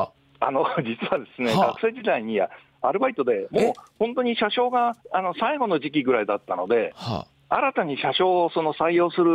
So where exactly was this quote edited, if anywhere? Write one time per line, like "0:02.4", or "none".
0:05.0

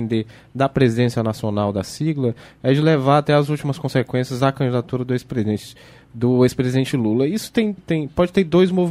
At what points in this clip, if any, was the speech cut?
0:07.8

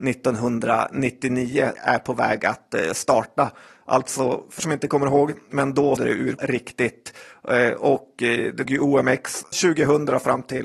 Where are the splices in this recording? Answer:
0:01.8
0:04.6
0:06.0
0:06.4
0:08.7
0:09.5

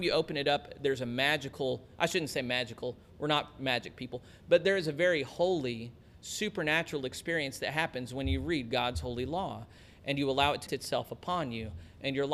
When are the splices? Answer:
0:10.7

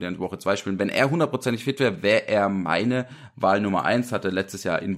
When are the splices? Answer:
none

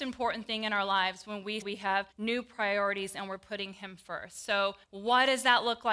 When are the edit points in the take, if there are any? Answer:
0:01.6
0:02.1
0:04.8

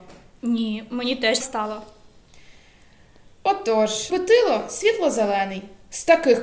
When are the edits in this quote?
0:01.4
0:04.1

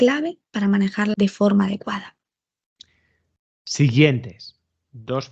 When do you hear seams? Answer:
0:01.1

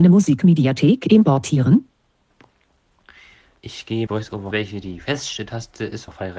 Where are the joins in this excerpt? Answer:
0:04.1

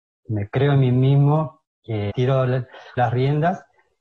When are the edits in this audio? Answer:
0:02.1
0:03.0

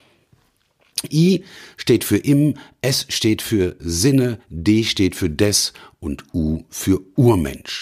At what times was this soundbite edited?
none

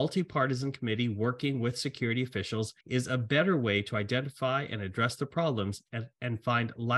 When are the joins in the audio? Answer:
0:02.8

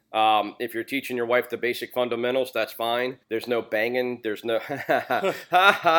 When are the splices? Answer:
0:03.2

